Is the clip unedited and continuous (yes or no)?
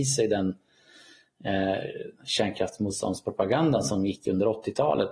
yes